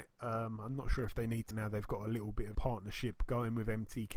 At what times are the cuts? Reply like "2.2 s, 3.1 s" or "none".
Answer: 1.5 s, 2.5 s